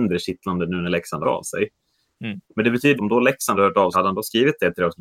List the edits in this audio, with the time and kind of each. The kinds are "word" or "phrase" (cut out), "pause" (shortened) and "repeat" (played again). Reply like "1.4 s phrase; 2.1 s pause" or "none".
1.2 s word; 2.4 s pause; 3.0 s phrase; 3.5 s word; 3.9 s phrase

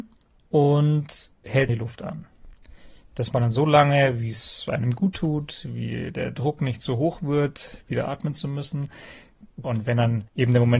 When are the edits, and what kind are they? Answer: 1.7 s word; 3.3 s word

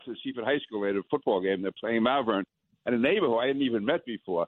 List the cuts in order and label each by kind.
none

